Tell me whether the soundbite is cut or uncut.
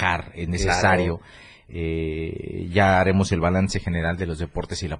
uncut